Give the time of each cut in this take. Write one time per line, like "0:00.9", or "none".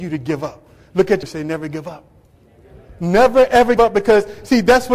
0:01.2
0:03.8